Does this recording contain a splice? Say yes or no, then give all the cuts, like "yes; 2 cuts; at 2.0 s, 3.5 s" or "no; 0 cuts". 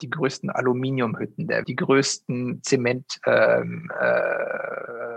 yes; 1 cut; at 1.6 s